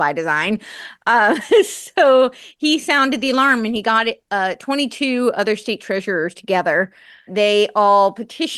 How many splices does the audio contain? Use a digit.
1